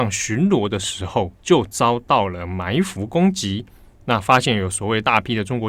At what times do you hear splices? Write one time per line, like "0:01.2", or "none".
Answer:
0:01.4